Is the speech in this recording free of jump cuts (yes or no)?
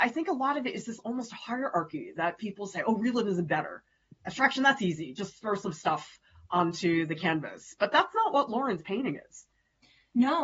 yes